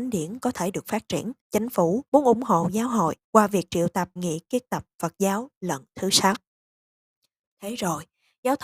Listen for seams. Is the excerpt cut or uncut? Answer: cut